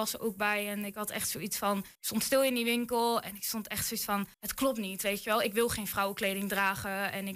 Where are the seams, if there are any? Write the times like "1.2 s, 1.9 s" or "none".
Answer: 1.9 s, 4.3 s